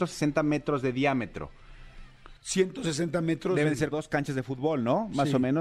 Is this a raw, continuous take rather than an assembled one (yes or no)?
no